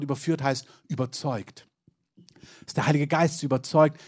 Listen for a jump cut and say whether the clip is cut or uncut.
uncut